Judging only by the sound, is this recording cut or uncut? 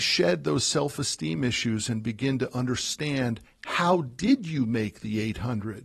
uncut